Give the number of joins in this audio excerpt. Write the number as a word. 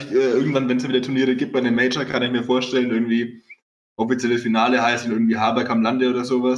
zero